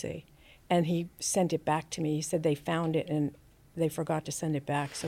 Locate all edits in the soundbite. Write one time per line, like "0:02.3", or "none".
none